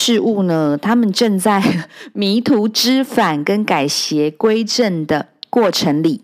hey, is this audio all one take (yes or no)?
yes